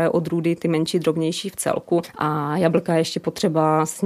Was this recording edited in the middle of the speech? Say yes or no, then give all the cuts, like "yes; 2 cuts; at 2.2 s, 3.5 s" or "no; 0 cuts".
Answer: no; 0 cuts